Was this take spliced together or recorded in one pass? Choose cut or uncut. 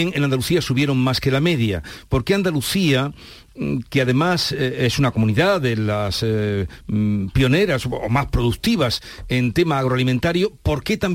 uncut